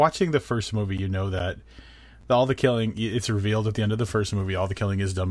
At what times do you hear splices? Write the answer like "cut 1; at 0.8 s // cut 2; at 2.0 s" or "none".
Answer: none